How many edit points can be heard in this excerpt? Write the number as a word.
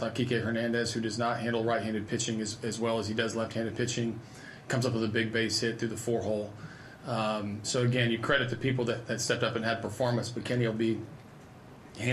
zero